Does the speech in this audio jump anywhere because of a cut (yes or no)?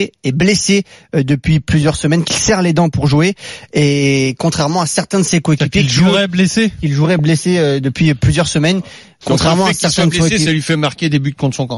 no